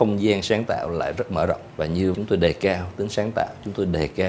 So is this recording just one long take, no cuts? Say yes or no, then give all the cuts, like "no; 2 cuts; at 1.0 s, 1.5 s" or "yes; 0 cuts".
no; 1 cut; at 2.1 s